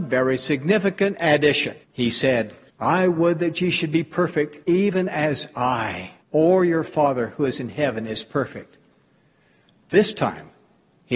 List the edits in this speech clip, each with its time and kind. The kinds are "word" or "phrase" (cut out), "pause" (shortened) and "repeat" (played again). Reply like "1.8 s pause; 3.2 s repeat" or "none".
1.8 s pause; 2.7 s pause; 4.6 s pause; 6.2 s pause